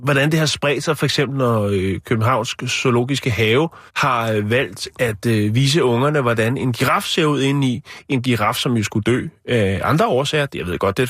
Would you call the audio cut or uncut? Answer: cut